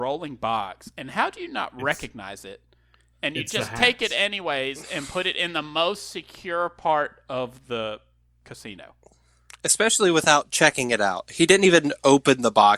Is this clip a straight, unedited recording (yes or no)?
yes